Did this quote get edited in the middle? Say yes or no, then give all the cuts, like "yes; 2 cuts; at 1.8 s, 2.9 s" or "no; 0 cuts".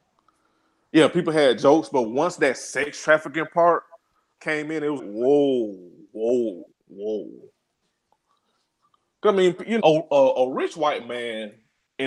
yes; 4 cuts; at 4.4 s, 5.0 s, 6.7 s, 9.8 s